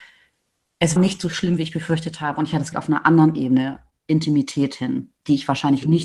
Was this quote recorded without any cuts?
no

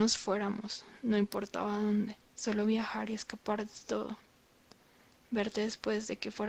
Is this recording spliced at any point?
yes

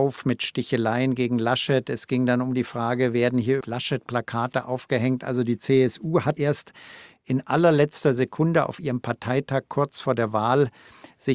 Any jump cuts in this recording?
yes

